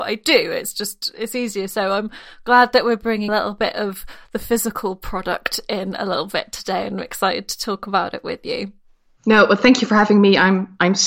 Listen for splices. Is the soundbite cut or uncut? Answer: cut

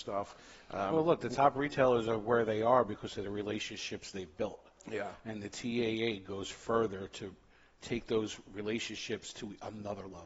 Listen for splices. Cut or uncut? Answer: uncut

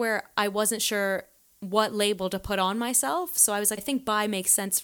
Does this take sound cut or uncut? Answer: cut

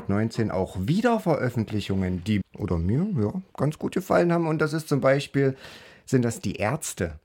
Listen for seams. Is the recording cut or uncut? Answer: cut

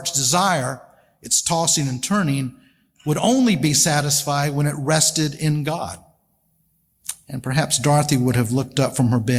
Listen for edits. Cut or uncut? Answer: uncut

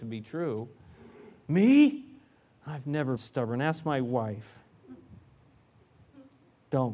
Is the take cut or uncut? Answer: cut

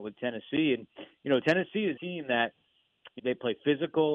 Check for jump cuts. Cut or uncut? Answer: cut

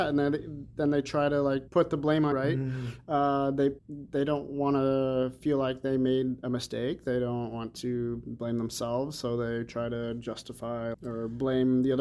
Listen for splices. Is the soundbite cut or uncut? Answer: cut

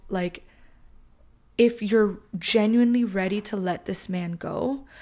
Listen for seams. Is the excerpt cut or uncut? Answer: uncut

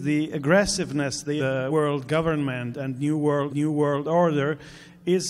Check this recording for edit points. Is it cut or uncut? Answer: cut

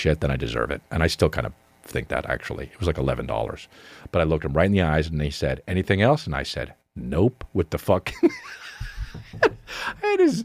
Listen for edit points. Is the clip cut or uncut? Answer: uncut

